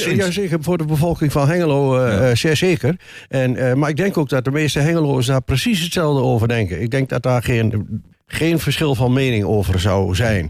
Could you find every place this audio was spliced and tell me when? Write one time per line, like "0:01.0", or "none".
0:08.1